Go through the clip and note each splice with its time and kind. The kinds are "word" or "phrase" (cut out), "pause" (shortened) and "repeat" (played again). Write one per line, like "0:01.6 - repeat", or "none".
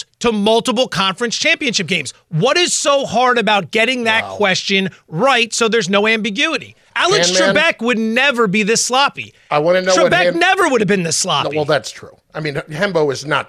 0:12.2 - pause